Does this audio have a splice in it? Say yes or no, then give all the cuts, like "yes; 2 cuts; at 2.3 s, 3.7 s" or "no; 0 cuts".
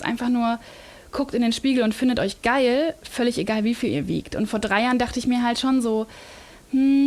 no; 0 cuts